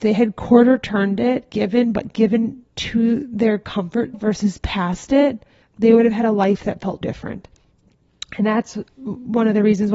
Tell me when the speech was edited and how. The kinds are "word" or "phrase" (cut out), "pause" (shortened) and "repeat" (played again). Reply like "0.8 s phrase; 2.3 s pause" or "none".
1.5 s phrase; 2.7 s pause; 4.1 s word; 5.6 s pause; 7.0 s word